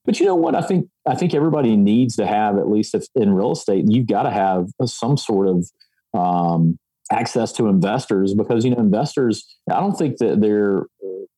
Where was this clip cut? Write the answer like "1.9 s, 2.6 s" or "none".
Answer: 6.9 s, 9.6 s